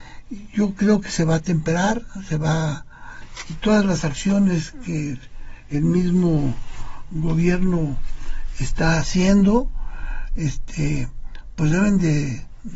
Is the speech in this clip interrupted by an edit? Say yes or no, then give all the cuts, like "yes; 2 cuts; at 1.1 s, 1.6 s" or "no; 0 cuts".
no; 0 cuts